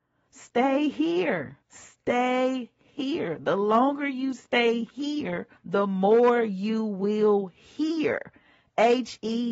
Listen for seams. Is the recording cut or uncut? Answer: cut